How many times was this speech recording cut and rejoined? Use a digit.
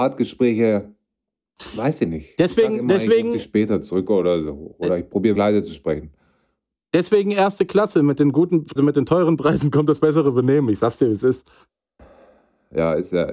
2